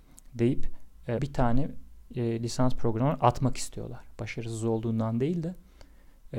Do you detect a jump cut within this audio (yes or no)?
yes